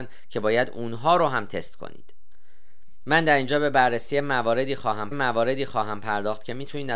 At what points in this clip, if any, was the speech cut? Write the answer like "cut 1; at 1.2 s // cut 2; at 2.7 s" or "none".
cut 1; at 5.1 s